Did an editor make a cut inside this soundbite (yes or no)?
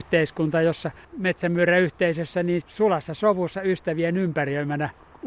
yes